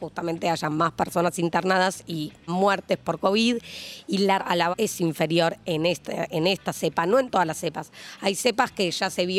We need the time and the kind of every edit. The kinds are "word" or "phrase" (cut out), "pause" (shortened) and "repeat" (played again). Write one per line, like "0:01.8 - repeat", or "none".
0:02.5 - word
0:04.4 - word
0:04.7 - word

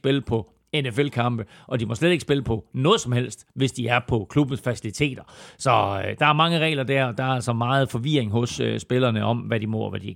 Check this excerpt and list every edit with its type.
none

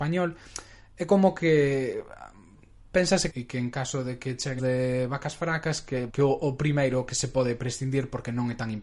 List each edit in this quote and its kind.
0:03.3 - phrase
0:04.6 - word
0:06.1 - word

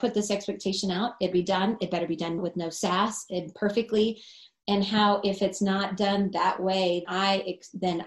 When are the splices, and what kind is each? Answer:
0:01.3 - word
0:02.4 - word
0:07.0 - word

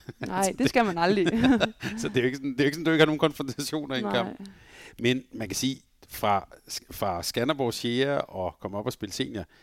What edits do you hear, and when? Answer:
none

